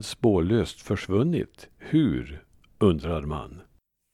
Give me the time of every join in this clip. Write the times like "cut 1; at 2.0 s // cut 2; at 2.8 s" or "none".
cut 1; at 1.7 s